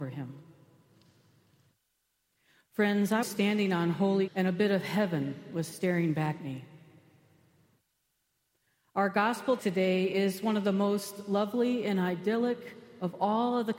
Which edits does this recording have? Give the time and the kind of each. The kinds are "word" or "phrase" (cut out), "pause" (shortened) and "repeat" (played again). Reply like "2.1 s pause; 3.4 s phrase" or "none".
3.2 s word; 4.3 s word; 6.4 s word; 9.6 s word

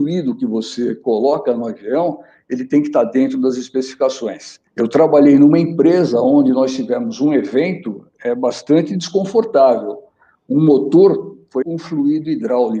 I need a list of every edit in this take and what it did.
4.7 s pause; 11.6 s word

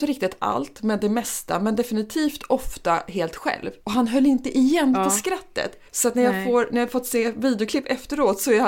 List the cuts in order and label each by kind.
3.8 s pause; 5.9 s pause

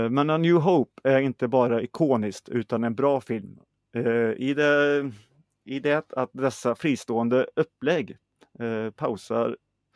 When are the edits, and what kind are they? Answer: none

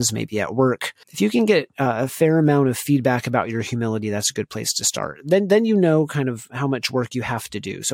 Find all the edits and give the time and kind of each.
1.0 s pause

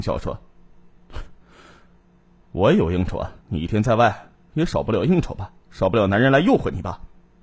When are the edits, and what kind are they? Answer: 3.4 s pause; 5.6 s pause

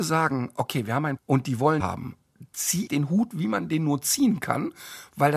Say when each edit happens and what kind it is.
1.2 s word; 1.8 s word; 2.9 s word

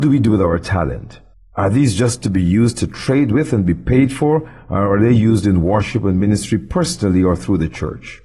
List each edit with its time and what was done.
1.3 s pause

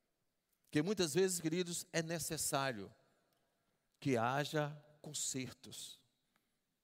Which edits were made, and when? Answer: none

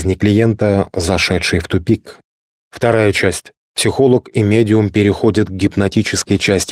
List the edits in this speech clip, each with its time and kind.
2.5 s pause; 3.6 s pause

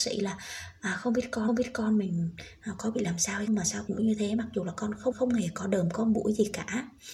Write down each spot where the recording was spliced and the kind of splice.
1.5 s repeat; 3.5 s word; 3.9 s phrase; 5.1 s repeat

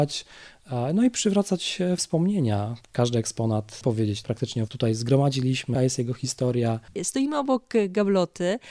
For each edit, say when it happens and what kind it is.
2.0 s word; 3.8 s phrase; 4.2 s word; 4.7 s phrase; 5.7 s word

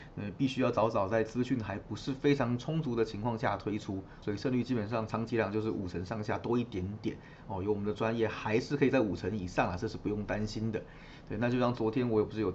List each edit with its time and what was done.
4.2 s word

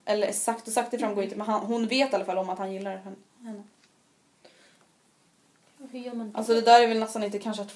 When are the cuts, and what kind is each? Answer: none

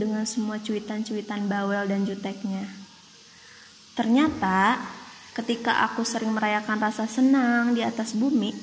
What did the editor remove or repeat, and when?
none

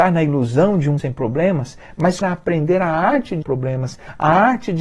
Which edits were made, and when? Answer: 1.0 s word; 2.2 s word; 3.4 s word

